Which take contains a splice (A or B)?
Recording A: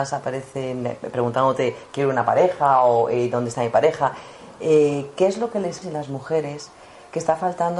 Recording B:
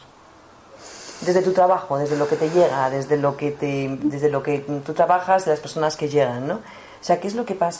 A